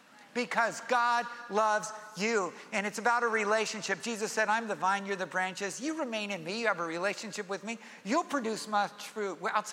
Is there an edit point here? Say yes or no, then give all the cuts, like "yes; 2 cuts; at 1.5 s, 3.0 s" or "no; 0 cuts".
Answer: no; 0 cuts